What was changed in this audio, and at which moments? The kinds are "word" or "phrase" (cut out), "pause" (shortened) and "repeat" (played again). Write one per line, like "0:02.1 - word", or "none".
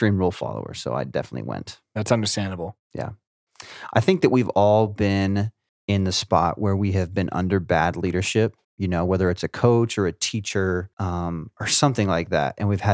0:05.7 - pause
0:08.6 - pause
0:10.9 - pause